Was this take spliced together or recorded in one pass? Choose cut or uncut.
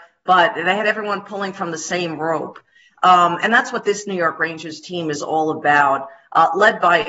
uncut